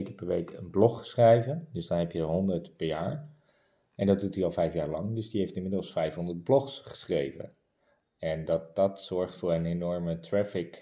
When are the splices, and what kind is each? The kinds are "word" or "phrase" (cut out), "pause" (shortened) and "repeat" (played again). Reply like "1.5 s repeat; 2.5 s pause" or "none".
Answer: none

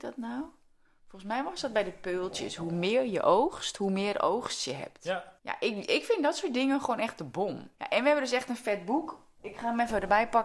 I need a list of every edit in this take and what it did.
5.4 s pause; 7.7 s pause

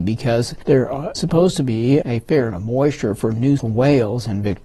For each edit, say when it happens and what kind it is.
1.1 s word; 2.0 s word; 2.5 s word; 3.6 s word

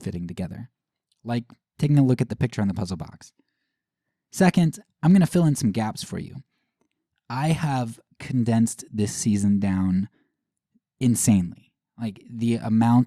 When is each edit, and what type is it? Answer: 2.3 s word

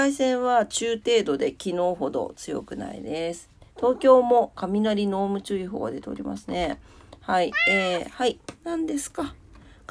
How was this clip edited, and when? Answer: 3.7 s pause; 8.6 s pause

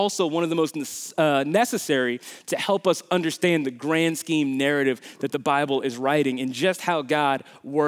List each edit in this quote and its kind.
none

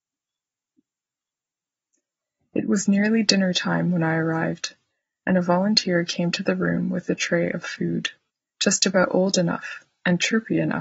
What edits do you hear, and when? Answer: none

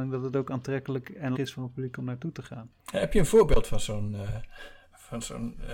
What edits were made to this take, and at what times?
1.4 s word; 2.8 s pause

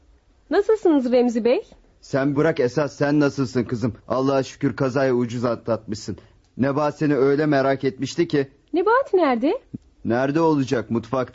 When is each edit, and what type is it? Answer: 2.4 s word; 4.0 s pause

